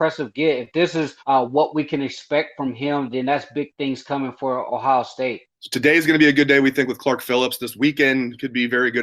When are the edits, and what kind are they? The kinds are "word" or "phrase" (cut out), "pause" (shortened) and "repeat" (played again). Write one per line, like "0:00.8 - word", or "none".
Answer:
0:01.2 - pause
0:05.5 - pause

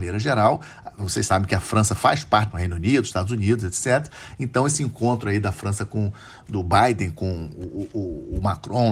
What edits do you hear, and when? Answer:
0:02.5 - phrase

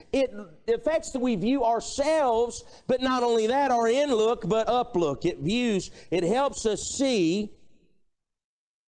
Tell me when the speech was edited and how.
0:01.1 - word
0:04.6 - word

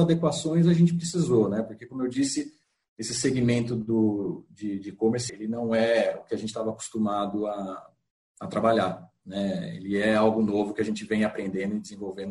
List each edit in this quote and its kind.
0:05.3 - word

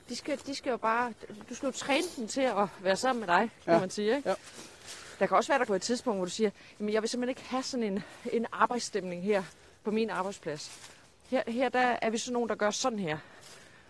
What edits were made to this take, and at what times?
0:05.7 - word

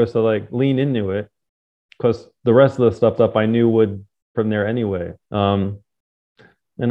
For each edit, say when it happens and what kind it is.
0:03.2 - repeat
0:04.3 - phrase
0:05.2 - pause

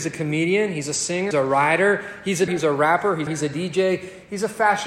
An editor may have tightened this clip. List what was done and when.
0:01.3 - word
0:02.5 - word
0:03.3 - phrase

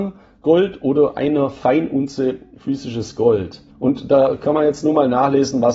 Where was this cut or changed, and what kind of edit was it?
0:03.7 - pause

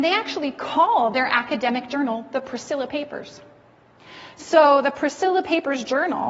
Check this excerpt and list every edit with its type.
none

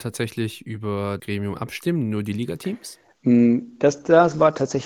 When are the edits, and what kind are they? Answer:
0:01.2 - word

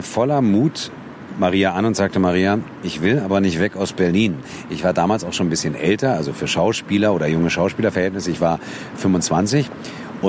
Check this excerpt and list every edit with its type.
none

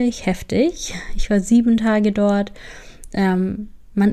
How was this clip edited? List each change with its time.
none

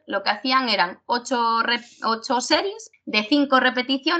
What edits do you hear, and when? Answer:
0:02.9 - word

